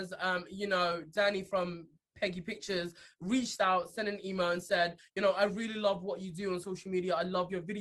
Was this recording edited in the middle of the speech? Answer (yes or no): no